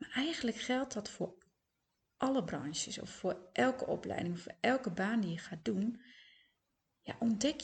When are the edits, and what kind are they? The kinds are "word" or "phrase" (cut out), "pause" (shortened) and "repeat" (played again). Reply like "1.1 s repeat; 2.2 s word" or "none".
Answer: none